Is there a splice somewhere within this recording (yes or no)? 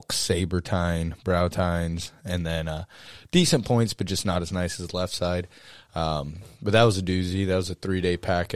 no